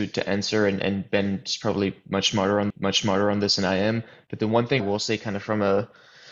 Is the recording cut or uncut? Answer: cut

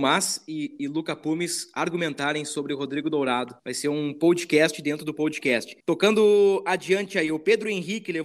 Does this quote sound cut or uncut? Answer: cut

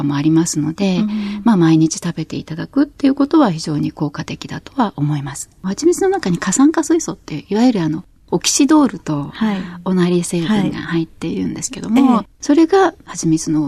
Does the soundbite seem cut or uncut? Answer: cut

